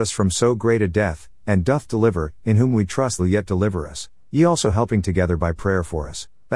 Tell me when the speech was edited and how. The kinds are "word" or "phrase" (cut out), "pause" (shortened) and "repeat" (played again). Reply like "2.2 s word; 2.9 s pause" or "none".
3.2 s phrase